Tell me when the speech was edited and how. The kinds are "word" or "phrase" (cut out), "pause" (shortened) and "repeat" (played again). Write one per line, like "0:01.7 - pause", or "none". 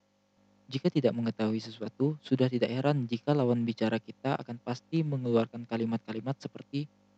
none